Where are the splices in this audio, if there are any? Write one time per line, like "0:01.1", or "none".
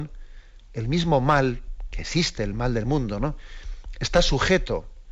none